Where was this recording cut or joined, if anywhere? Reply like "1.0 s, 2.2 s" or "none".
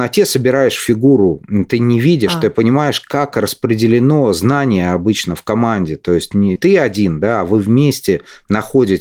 6.6 s